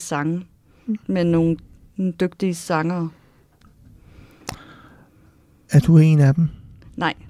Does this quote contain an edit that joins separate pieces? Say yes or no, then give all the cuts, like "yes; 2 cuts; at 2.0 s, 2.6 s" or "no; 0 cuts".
no; 0 cuts